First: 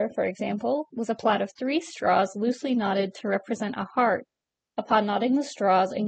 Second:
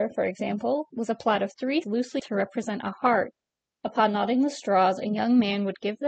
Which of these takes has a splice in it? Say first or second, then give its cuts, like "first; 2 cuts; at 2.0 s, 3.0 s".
second; 2 cuts; at 1.8 s, 2.2 s